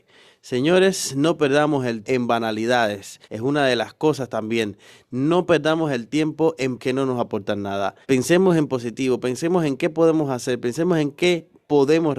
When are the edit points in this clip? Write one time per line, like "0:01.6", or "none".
0:02.0
0:03.2
0:06.8
0:08.0